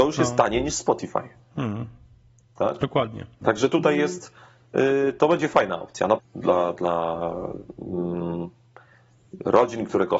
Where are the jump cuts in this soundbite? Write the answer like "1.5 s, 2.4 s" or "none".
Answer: 3.4 s, 6.2 s